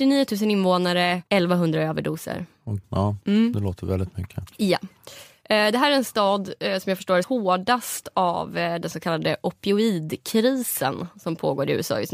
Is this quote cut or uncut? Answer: cut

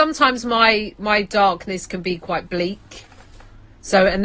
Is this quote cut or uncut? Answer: uncut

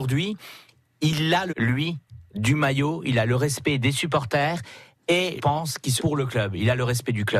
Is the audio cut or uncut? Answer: cut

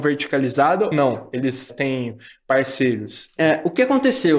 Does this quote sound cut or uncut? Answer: cut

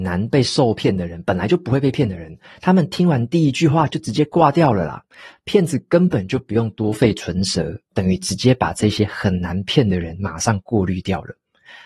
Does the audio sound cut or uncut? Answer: uncut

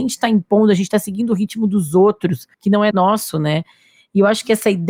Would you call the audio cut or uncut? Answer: cut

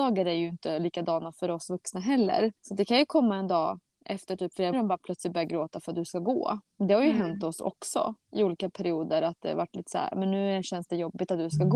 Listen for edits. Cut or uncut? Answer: cut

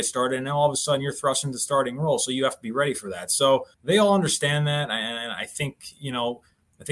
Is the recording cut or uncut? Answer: cut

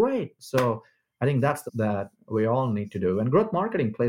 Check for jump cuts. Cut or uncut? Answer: cut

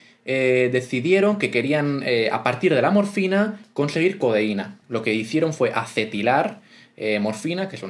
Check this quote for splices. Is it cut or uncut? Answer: cut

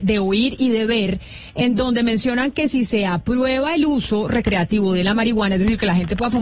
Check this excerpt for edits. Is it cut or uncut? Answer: uncut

